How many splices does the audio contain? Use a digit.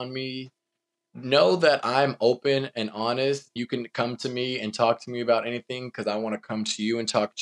1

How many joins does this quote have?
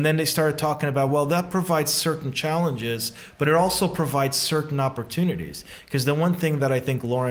0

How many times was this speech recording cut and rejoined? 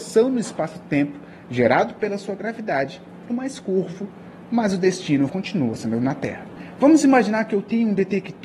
2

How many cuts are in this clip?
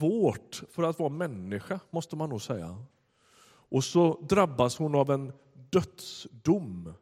0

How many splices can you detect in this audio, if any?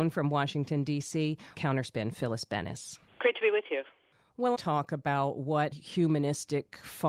4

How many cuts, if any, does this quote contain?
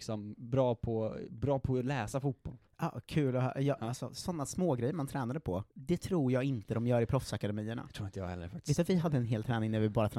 2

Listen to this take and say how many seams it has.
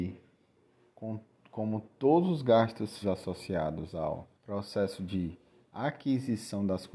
2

